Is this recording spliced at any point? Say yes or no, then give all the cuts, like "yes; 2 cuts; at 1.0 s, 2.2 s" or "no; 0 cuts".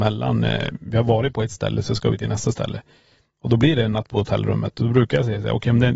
no; 0 cuts